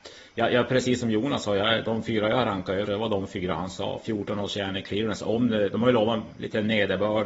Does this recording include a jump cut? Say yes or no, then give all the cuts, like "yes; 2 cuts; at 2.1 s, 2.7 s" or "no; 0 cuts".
yes; 1 cut; at 2.8 s